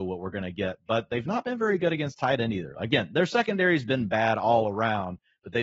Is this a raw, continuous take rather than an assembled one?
yes; 0 cuts

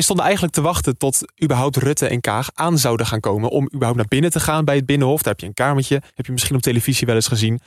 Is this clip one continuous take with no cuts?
no; 1 cut; at 6.1 s

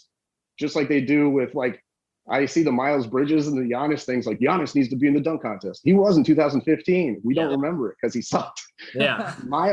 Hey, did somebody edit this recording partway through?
no; 0 cuts

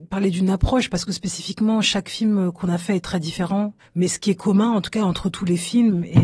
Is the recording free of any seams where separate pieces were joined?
yes; 0 cuts

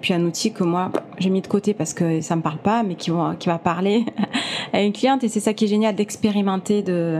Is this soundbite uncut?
yes; 0 cuts

